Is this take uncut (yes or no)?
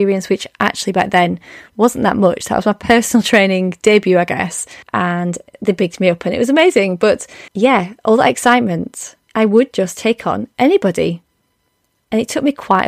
no